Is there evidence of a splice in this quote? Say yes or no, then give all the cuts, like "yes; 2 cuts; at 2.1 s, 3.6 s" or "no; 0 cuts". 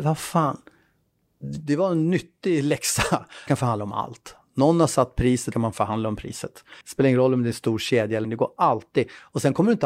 yes; 4 cuts; at 3.5 s, 5.5 s, 6.8 s, 8.2 s